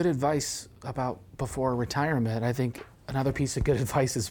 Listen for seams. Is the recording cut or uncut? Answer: uncut